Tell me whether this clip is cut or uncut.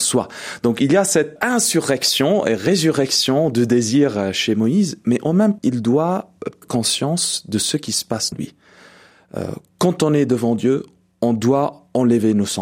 cut